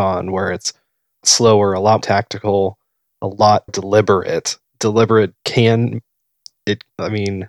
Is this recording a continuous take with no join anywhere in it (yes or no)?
no